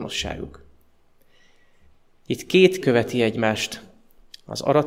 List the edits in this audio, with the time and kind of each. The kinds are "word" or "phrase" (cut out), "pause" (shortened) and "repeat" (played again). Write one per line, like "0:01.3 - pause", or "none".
0:02.8 - word